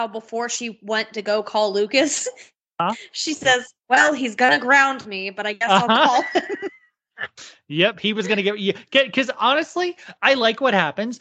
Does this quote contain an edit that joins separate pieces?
no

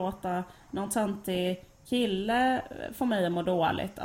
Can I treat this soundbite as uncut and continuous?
yes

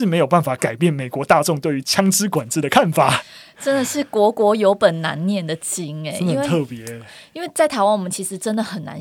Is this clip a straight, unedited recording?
yes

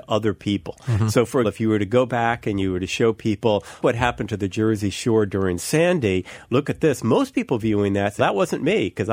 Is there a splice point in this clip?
yes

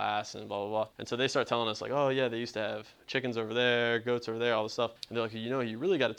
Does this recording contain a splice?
yes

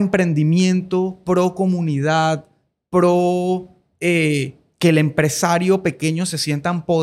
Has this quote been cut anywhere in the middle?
no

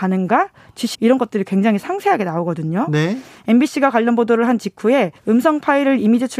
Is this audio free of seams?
no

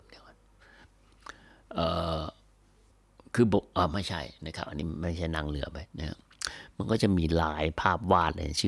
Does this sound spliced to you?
yes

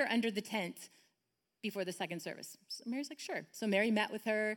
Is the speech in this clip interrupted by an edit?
no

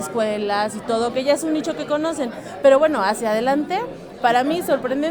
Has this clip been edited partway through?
no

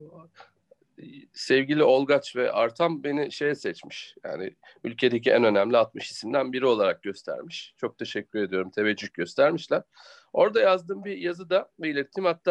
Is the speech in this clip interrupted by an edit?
no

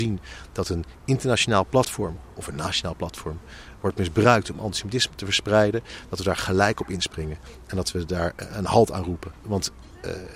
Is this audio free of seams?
yes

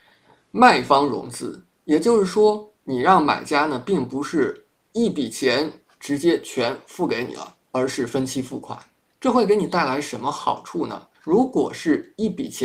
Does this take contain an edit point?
yes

